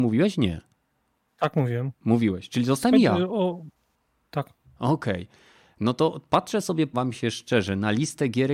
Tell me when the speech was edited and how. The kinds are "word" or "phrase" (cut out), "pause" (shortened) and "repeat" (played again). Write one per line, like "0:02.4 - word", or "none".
0:06.9 - word

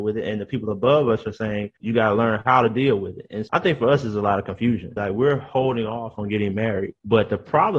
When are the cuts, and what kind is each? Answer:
0:01.8 - word
0:03.5 - word

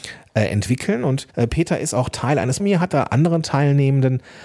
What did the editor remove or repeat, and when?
0:01.3 - pause
0:02.6 - phrase

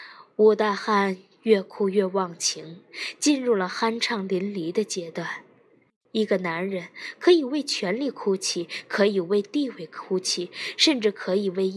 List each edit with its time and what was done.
none

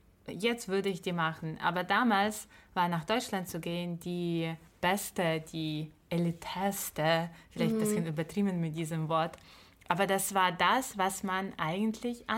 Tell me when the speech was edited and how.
0:04.7 - pause

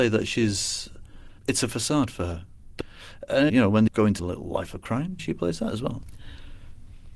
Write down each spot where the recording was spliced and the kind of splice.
0:01.4 - word
0:03.5 - word
0:03.9 - word
0:04.2 - word
0:05.2 - word

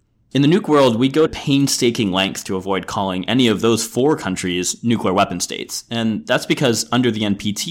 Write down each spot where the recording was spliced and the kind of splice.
0:01.3 - word

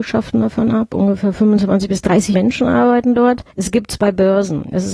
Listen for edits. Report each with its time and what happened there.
0:02.3 - word
0:03.5 - pause

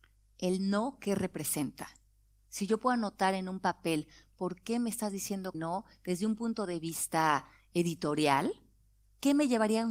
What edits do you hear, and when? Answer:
0:05.5 - word

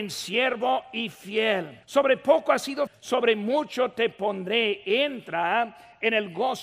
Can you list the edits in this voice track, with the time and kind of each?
0:01.8 - pause
0:02.9 - word

